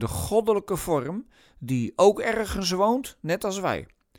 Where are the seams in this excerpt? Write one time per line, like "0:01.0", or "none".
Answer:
none